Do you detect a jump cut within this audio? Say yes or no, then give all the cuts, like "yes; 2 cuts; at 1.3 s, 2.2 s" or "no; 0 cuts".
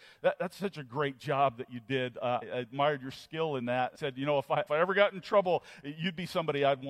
yes; 3 cuts; at 2.4 s, 3.9 s, 4.7 s